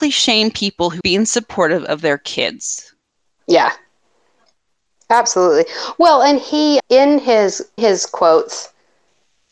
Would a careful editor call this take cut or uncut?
cut